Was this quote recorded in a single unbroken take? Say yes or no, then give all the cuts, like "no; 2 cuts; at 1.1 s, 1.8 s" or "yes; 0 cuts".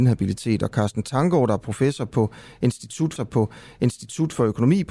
no; 1 cut; at 3.2 s